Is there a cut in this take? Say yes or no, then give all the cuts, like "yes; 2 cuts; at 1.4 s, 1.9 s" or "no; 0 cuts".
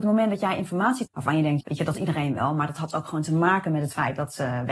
yes; 3 cuts; at 1.1 s, 1.6 s, 1.9 s